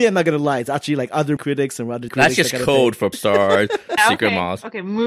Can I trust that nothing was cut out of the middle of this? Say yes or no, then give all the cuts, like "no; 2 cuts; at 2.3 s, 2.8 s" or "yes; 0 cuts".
no; 4 cuts; at 1.4 s, 2.1 s, 3.1 s, 4.0 s